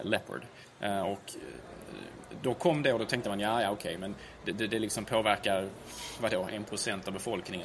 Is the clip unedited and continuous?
yes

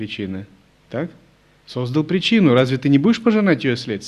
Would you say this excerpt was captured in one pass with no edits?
yes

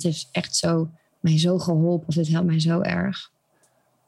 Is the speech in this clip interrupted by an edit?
yes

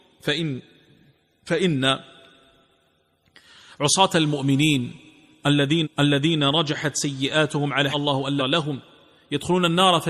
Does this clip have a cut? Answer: yes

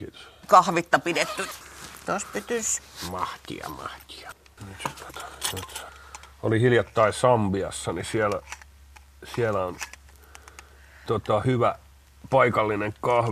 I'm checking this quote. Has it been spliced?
no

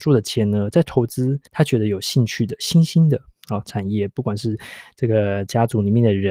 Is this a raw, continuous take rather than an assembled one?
no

